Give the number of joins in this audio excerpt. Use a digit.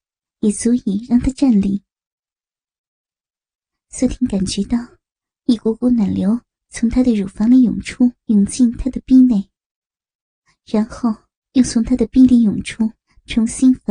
2